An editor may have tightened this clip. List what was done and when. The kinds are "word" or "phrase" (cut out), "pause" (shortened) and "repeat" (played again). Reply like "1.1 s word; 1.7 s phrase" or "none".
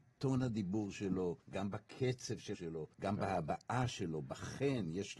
1.4 s pause; 2.5 s word; 2.9 s pause